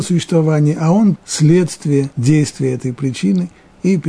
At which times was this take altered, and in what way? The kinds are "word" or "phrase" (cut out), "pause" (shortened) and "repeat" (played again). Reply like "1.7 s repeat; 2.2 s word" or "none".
1.2 s word; 2.1 s pause